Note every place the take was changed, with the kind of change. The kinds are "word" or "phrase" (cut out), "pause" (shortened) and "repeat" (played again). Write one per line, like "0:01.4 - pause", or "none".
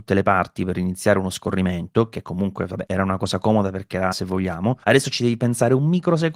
0:02.9 - word
0:04.1 - phrase
0:04.8 - pause